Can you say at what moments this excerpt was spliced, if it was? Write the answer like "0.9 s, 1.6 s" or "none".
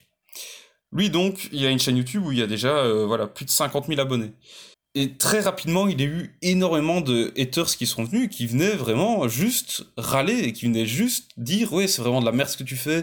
4.7 s